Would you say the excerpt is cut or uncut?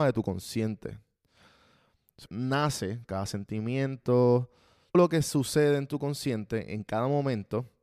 cut